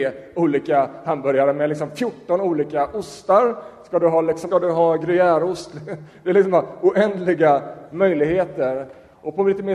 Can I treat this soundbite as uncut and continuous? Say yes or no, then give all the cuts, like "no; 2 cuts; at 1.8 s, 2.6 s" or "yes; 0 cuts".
no; 1 cut; at 4.5 s